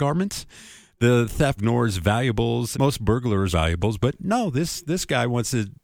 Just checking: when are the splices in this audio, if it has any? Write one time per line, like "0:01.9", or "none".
0:01.6
0:02.7
0:03.5